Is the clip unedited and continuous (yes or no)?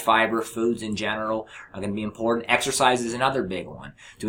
yes